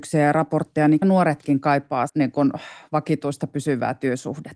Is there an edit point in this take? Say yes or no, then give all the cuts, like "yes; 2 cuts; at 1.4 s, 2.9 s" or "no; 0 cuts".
yes; 2 cuts; at 1.0 s, 2.1 s